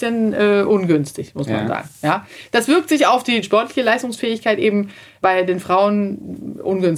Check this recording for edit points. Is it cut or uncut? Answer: uncut